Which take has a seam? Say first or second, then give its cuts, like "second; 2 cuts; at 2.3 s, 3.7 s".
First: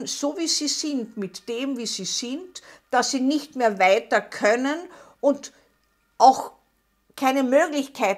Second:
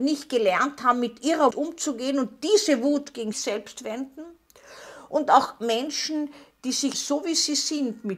second; 3 cuts; at 1.5 s, 3.3 s, 6.9 s